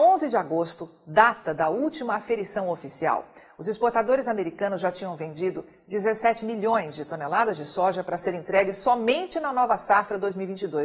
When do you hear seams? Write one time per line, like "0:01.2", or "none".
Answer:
none